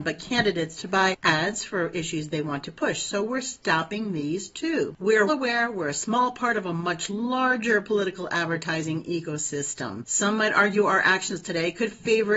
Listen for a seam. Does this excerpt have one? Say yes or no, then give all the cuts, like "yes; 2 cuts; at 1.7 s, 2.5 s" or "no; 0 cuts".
yes; 1 cut; at 5.3 s